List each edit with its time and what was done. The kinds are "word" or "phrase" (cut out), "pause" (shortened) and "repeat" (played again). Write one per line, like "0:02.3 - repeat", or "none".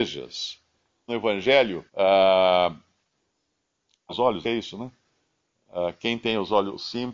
0:01.1 - phrase
0:01.9 - pause
0:04.1 - phrase
0:04.4 - word